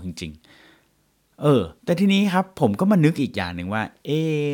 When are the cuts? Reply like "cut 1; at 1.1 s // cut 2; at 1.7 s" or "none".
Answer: cut 1; at 1.8 s